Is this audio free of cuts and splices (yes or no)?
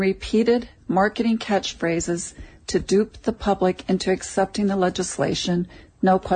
yes